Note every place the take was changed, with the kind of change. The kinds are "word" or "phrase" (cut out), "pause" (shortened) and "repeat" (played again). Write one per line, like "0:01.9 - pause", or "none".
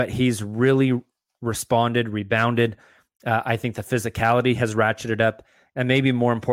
none